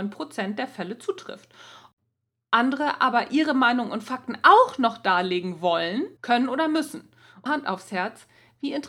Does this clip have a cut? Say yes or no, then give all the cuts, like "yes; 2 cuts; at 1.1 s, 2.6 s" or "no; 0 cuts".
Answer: yes; 2 cuts; at 6.2 s, 7.5 s